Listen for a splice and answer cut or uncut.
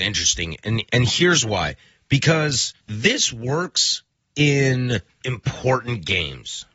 cut